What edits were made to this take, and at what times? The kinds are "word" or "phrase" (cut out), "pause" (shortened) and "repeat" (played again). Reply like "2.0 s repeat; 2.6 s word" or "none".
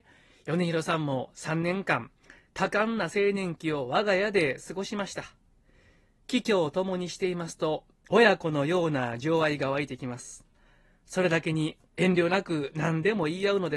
none